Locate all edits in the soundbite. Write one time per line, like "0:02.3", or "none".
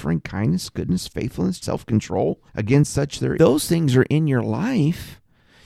0:01.6
0:02.5
0:03.4

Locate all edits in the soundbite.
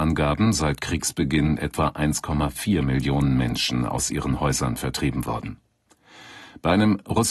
none

